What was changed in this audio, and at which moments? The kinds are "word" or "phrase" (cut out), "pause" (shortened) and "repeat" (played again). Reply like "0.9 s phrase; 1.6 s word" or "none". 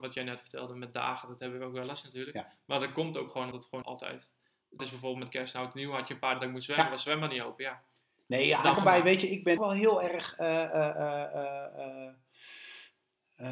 3.5 s word; 3.8 s word; 4.8 s word; 6.3 s word; 8.7 s word; 9.6 s word